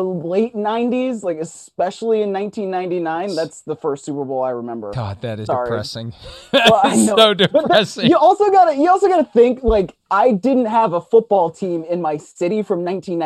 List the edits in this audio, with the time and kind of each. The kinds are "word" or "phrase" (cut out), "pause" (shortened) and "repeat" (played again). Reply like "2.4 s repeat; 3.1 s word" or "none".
5.5 s word

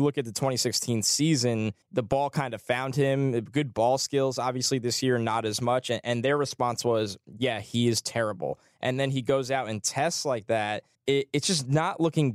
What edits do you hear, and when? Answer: 1.8 s pause; 10.9 s pause

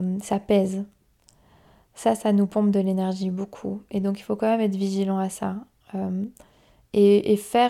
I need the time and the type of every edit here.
none

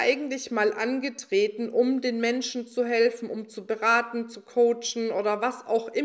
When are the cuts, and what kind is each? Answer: none

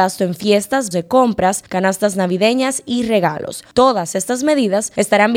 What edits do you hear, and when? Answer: 0.9 s word

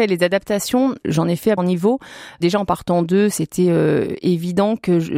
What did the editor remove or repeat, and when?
1.6 s word

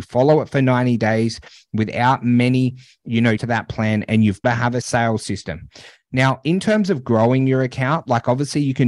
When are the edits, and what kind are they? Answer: 3.4 s word; 4.4 s word; 4.8 s word

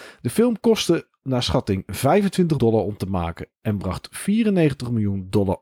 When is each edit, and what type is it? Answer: 2.6 s word

